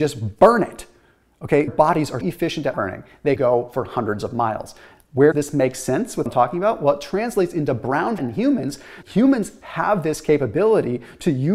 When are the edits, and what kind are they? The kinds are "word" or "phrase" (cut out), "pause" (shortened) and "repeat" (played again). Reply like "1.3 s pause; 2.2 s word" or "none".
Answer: 1.7 s word; 2.2 s word; 2.7 s word; 3.4 s word; 5.3 s word; 6.3 s word; 8.2 s word; 9.0 s word